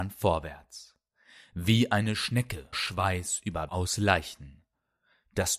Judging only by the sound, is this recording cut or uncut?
cut